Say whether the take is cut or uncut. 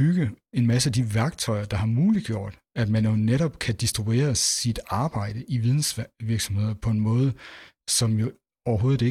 uncut